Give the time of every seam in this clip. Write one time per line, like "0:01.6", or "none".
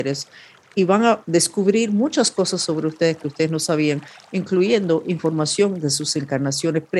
0:01.2